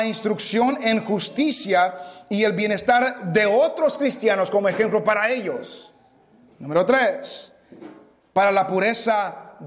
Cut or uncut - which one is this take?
uncut